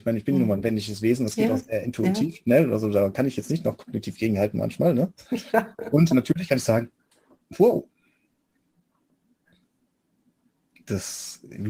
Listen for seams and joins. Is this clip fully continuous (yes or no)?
yes